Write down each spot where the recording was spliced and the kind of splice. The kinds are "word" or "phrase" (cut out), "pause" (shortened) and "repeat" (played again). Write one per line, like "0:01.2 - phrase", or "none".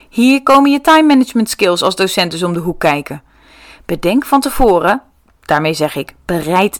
none